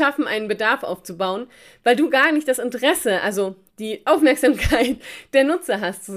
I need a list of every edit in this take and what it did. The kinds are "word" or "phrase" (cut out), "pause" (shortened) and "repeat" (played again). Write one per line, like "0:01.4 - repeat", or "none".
none